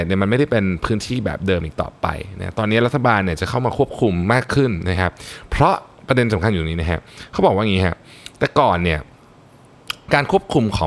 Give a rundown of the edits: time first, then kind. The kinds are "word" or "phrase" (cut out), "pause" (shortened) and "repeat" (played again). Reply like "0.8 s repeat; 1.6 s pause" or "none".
none